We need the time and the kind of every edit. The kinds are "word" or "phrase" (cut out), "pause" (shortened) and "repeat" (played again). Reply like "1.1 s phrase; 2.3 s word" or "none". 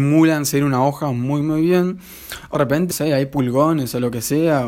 1.4 s word; 2.5 s word; 2.9 s word